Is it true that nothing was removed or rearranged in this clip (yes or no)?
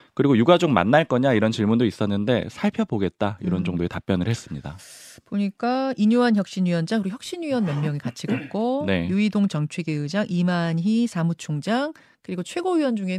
yes